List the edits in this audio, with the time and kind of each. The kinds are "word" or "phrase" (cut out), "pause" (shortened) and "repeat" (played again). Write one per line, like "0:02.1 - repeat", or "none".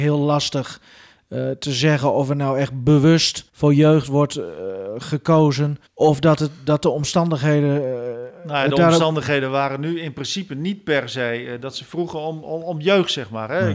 0:03.5 - pause
0:05.9 - pause